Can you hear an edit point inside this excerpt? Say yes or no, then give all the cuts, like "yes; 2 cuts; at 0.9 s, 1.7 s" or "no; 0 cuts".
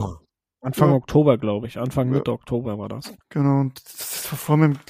yes; 1 cut; at 3.2 s